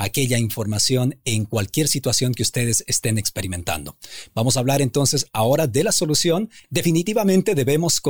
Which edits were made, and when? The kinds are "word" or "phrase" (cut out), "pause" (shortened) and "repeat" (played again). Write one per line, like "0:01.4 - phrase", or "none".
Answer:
none